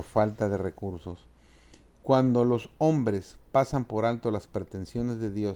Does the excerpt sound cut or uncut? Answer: uncut